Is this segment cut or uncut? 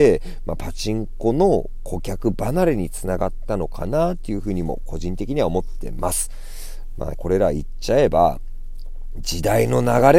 cut